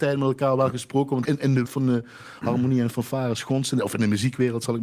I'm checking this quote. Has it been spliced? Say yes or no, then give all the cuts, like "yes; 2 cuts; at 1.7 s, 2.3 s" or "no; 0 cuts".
yes; 2 cuts; at 1.2 s, 1.6 s